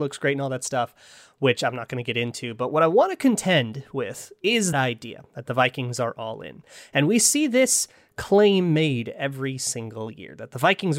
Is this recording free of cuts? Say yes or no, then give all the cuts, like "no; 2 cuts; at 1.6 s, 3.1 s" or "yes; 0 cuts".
no; 1 cut; at 4.7 s